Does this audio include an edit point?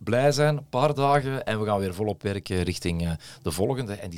no; 0 cuts

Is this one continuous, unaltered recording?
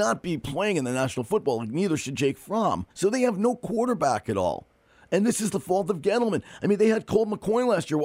no; 1 cut; at 2.9 s

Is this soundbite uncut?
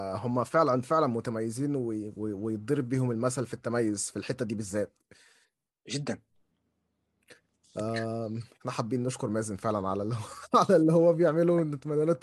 yes; 0 cuts

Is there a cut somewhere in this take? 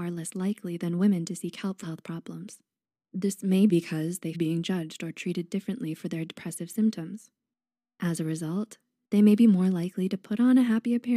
yes; 3 cuts; at 1.8 s, 3.7 s, 4.3 s

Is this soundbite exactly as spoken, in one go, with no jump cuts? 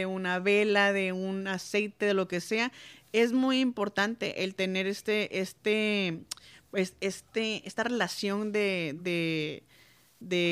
yes; 0 cuts

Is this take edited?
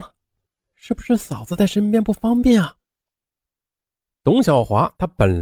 no; 0 cuts

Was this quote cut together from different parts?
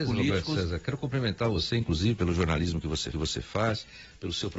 yes; 1 cut; at 3.1 s

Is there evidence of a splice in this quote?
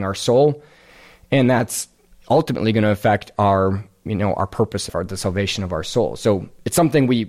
yes; 1 cut; at 4.9 s

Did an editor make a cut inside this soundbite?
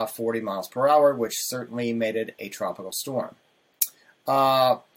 no; 0 cuts

